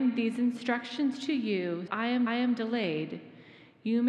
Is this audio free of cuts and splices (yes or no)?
no